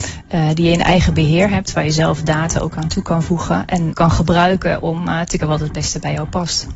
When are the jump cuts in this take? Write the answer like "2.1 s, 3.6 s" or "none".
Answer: 3.9 s, 5.4 s